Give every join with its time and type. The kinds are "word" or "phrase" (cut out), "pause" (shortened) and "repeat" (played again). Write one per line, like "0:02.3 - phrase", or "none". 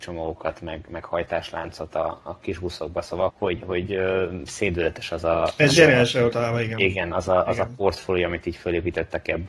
0:02.4 - phrase
0:03.3 - word
0:06.3 - phrase